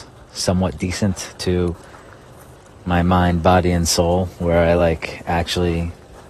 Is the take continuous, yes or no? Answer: yes